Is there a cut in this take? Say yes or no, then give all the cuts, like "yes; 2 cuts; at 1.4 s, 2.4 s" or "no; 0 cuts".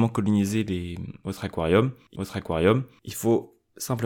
yes; 1 cut; at 2.1 s